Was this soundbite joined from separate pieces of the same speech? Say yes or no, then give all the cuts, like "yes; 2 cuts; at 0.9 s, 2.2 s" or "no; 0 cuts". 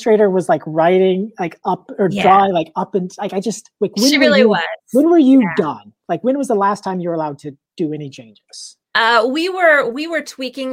yes; 2 cuts; at 7.7 s, 8.8 s